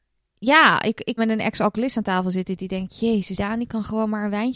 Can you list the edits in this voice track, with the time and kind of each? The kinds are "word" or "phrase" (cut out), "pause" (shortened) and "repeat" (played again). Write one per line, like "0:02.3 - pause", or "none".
0:01.2 - word
0:03.4 - word